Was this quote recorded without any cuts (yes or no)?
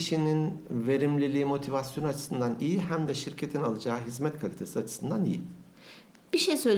yes